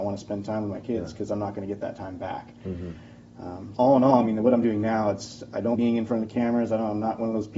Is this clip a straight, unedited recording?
no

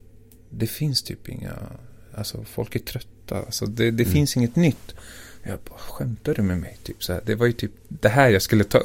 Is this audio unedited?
yes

